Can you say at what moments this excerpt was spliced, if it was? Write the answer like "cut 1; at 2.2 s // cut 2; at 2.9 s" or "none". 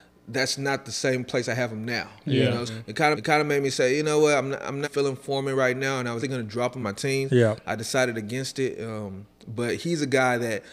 cut 1; at 2.7 s // cut 2; at 3.1 s // cut 3; at 4.8 s // cut 4; at 6.2 s // cut 5; at 6.8 s // cut 6; at 9.3 s

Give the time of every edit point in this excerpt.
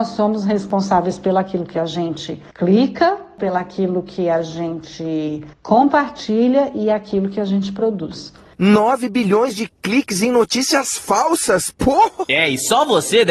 none

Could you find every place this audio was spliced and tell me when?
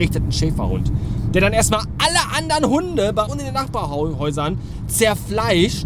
cut 1; at 3.3 s

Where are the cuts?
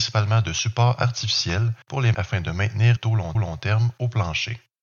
cut 1; at 1.8 s // cut 2; at 2.1 s // cut 3; at 3.0 s // cut 4; at 3.3 s

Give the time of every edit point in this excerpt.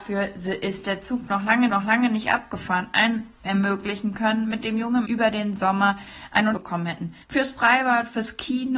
cut 1; at 1.7 s // cut 2; at 3.4 s // cut 3; at 5.0 s // cut 4; at 6.5 s // cut 5; at 7.2 s

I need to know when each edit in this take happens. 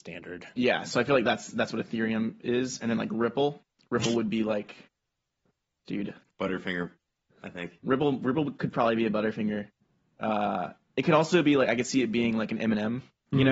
none

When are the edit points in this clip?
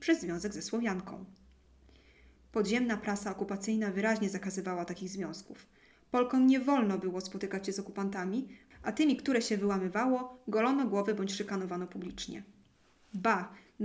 none

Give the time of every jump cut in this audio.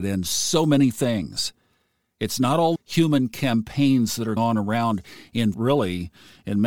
cut 1; at 2.8 s // cut 2; at 4.4 s // cut 3; at 5.5 s

